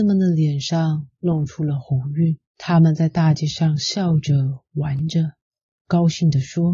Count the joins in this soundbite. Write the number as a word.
one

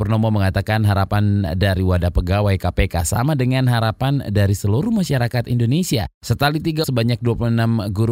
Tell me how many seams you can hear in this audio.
two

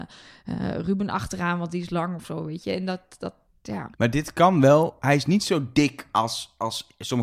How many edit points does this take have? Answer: one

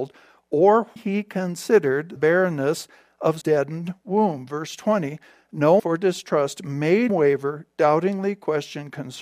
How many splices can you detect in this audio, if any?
five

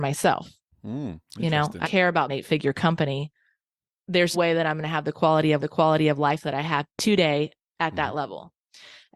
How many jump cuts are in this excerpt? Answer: six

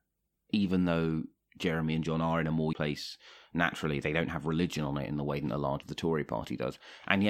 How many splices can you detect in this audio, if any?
two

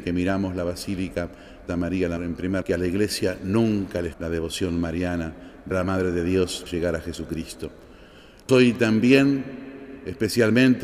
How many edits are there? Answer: seven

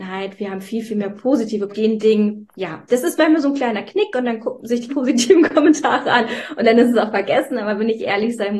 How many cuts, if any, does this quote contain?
three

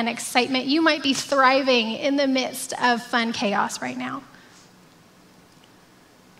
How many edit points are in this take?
zero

